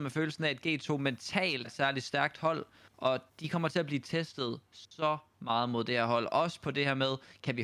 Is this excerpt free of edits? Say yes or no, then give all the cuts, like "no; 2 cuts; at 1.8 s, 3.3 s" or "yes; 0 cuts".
no; 2 cuts; at 1.6 s, 3.3 s